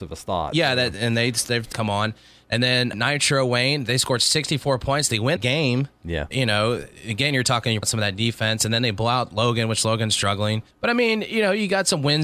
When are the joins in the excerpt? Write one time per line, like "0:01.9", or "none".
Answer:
0:01.7
0:02.9
0:05.4
0:06.3
0:07.8
0:10.7